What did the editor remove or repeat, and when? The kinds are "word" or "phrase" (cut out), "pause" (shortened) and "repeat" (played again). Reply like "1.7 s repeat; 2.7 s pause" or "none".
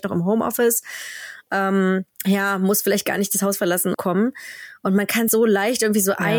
2.1 s pause; 3.9 s phrase; 5.3 s word

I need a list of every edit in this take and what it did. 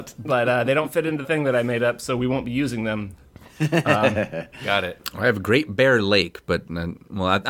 1.2 s word

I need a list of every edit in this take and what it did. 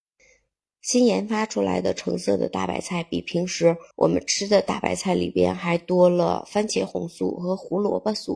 3.9 s pause

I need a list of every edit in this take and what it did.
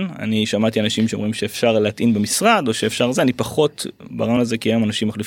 none

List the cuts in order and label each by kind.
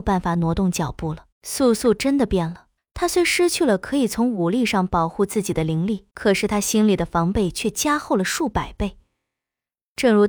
1.3 s pause; 2.8 s pause; 6.1 s pause

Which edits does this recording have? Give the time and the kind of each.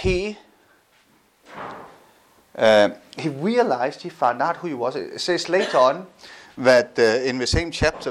none

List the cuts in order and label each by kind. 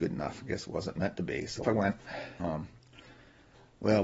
1.6 s word; 2.4 s word

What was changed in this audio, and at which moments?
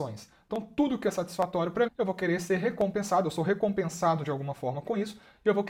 1.9 s word

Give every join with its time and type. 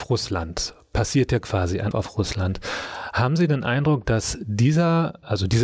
1.9 s word

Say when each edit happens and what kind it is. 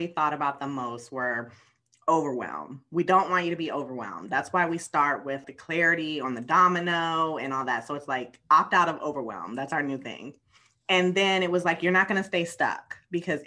none

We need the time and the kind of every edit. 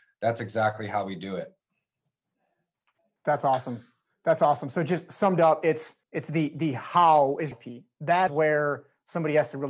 6.0 s pause; 7.5 s phrase; 8.3 s word

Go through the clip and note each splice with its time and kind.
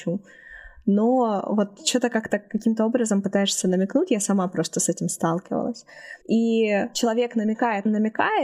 6.2 s pause

